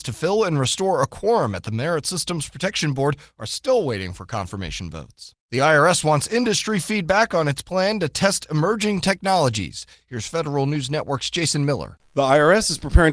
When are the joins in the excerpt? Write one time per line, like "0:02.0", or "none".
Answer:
0:05.4

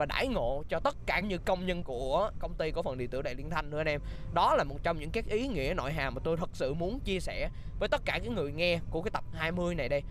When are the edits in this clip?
0:01.2
0:01.8

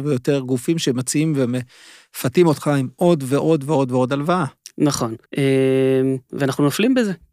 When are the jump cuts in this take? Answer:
0:05.3

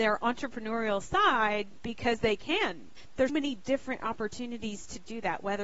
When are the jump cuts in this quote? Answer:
0:03.3

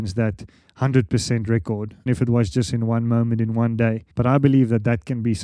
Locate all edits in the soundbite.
0:02.1
0:04.1

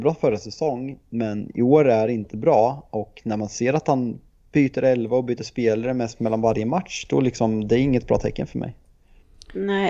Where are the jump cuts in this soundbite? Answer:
none

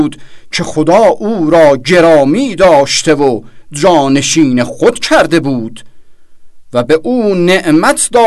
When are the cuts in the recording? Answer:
none

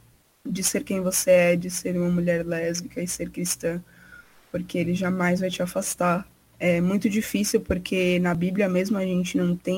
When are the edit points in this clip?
none

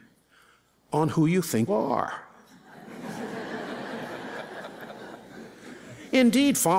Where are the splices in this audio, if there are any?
0:01.7

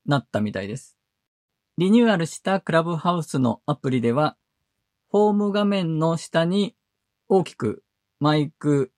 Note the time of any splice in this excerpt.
none

